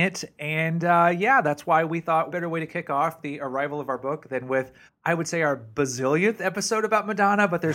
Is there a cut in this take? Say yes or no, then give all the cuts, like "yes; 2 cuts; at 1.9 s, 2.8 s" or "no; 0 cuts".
yes; 2 cuts; at 2.3 s, 4.9 s